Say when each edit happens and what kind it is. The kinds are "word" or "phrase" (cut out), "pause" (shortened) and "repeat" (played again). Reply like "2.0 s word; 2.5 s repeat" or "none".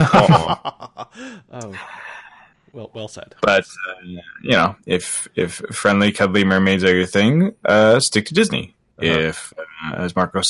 none